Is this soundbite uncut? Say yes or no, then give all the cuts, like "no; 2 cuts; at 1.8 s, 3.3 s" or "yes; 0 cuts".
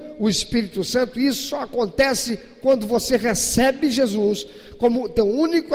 yes; 0 cuts